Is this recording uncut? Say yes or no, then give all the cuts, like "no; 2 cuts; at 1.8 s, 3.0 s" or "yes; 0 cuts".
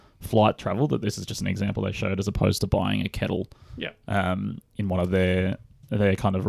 yes; 0 cuts